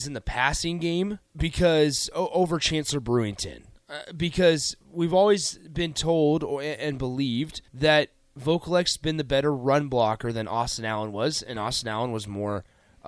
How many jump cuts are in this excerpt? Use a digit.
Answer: 2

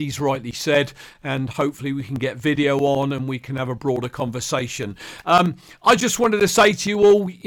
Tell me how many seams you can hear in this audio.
0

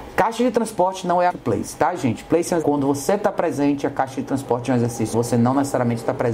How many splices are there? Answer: 3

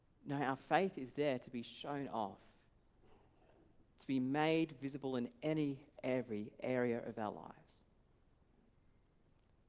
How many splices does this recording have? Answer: 0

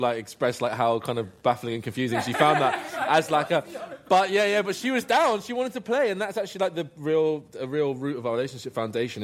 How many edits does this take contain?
0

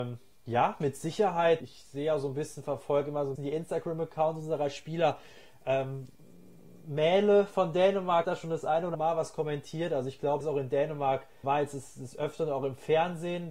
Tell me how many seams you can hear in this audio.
6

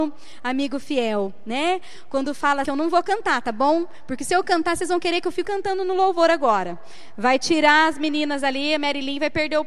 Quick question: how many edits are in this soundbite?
2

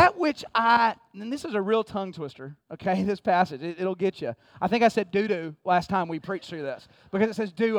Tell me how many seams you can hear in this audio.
0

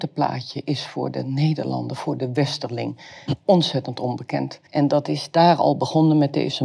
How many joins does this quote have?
1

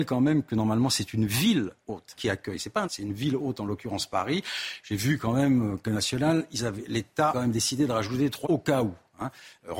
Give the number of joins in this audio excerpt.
5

